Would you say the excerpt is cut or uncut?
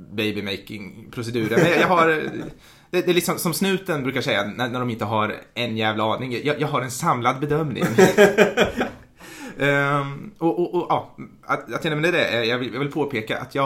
uncut